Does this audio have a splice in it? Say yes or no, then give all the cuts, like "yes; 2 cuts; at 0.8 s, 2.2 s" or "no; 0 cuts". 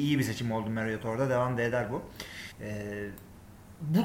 yes; 1 cut; at 2.5 s